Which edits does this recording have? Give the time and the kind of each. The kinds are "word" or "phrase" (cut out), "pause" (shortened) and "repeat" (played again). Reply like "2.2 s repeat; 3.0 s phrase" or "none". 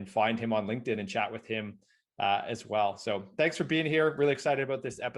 none